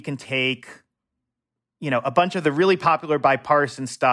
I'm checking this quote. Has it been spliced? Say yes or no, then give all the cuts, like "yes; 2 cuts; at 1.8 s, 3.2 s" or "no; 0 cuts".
no; 0 cuts